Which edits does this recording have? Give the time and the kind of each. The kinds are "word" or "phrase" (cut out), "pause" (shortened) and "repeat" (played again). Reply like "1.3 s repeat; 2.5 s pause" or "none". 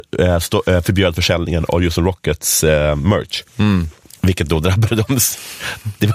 3.4 s pause